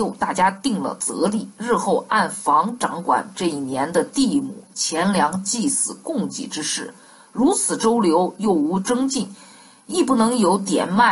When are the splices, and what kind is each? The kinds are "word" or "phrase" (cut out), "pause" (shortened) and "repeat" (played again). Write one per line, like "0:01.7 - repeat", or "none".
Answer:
none